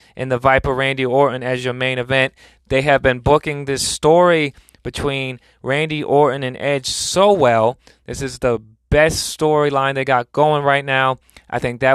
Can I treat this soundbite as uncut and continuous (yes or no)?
yes